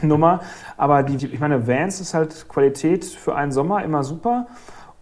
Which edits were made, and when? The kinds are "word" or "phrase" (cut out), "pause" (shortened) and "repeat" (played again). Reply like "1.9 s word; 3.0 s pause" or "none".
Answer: 1.2 s phrase